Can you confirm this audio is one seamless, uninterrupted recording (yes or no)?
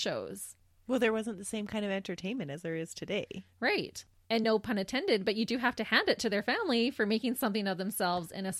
yes